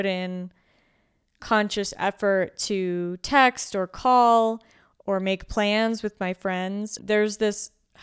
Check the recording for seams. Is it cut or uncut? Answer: cut